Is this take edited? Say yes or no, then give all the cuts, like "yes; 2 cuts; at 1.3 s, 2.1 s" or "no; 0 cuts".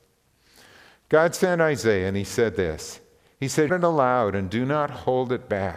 yes; 1 cut; at 3.7 s